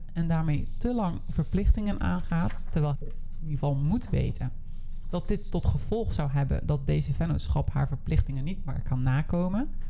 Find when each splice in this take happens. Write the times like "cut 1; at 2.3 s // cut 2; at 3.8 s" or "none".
cut 1; at 2.9 s